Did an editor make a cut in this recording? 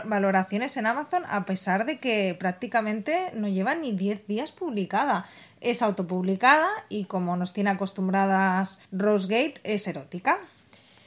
yes; 1 cut; at 8.8 s

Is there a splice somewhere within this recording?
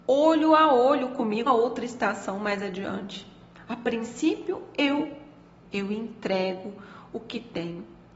yes; 2 cuts; at 1.5 s, 5.6 s

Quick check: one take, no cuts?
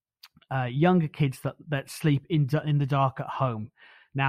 yes; 0 cuts

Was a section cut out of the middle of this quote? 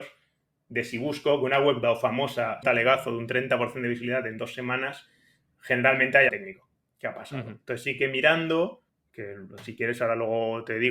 yes; 4 cuts; at 1.8 s, 2.6 s, 6.3 s, 8.9 s

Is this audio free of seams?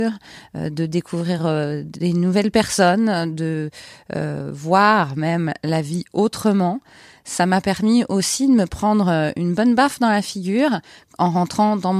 yes; 0 cuts

